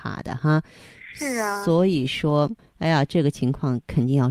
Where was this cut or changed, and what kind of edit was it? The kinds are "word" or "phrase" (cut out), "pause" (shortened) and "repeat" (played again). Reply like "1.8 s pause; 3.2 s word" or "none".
none